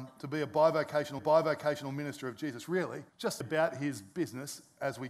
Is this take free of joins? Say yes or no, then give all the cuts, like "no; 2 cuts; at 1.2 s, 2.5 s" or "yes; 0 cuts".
no; 3 cuts; at 1.2 s, 3.1 s, 3.4 s